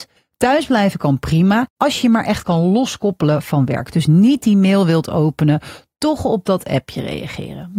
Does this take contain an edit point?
no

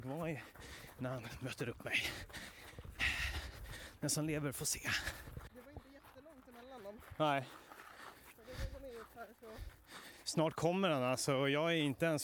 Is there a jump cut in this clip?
no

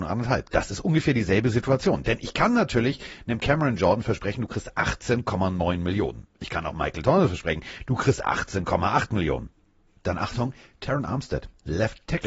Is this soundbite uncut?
yes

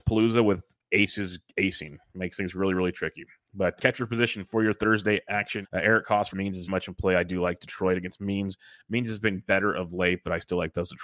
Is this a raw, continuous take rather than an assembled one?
no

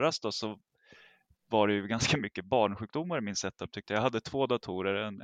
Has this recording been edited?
no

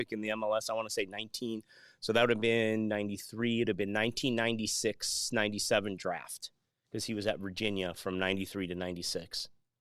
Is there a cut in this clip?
no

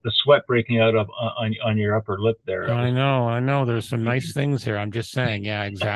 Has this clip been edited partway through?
no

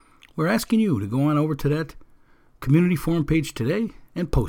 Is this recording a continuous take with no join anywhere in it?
yes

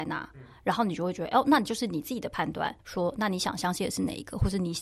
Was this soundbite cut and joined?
yes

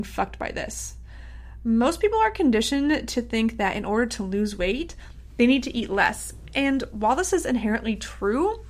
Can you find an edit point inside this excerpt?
no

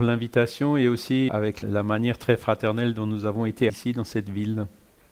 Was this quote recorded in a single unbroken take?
no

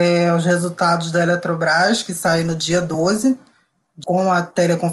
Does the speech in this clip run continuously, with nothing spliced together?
no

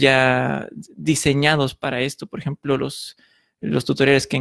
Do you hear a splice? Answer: no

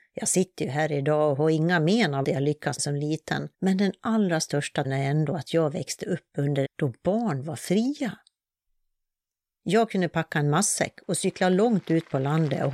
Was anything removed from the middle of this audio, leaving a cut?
yes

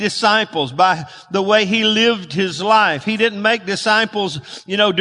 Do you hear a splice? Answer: no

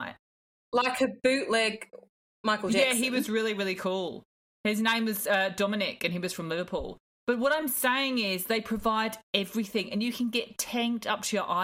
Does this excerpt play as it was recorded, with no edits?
yes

